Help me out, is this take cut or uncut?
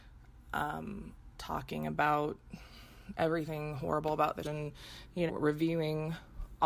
cut